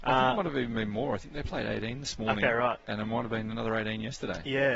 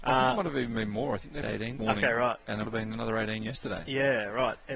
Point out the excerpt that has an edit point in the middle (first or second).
second